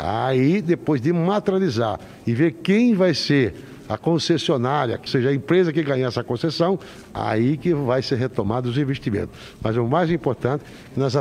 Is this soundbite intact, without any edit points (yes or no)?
no